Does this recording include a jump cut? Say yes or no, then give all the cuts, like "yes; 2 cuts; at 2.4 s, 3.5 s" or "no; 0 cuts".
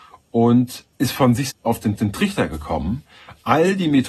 yes; 3 cuts; at 0.9 s, 1.5 s, 2.0 s